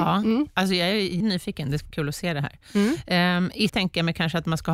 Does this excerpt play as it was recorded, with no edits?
no; 3 cuts; at 1.2 s, 1.9 s, 3.7 s

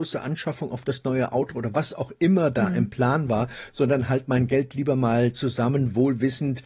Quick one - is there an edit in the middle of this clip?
no; 0 cuts

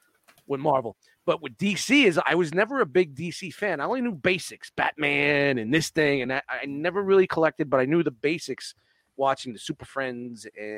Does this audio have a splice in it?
no; 0 cuts

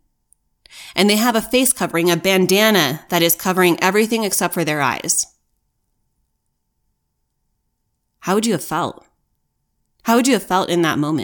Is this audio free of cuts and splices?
yes; 0 cuts

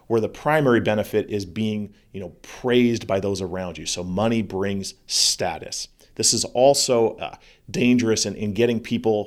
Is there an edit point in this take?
no; 0 cuts

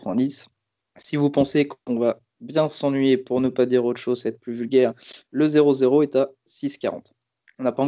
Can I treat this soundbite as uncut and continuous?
yes; 0 cuts

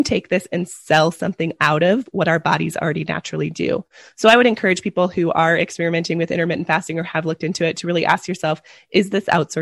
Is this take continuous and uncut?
yes; 0 cuts

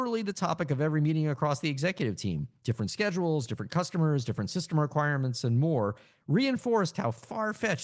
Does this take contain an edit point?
no; 0 cuts

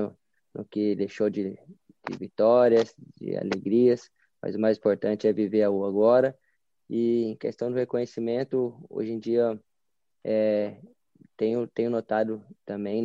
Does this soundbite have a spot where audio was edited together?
no; 0 cuts

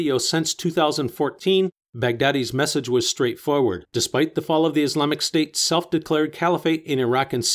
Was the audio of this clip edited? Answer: yes; 1 cut; at 3.9 s

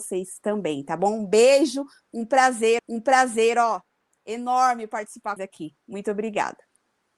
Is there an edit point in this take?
yes; 2 cuts; at 2.8 s, 5.4 s

